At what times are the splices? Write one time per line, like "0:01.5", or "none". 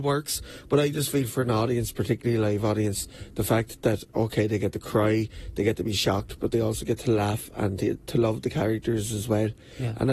none